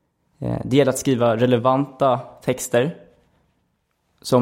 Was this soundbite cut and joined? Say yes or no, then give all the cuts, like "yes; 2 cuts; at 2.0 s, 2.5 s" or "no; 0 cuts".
no; 0 cuts